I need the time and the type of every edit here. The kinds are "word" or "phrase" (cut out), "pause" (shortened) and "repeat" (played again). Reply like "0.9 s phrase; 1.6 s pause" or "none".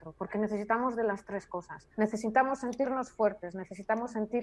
1.9 s pause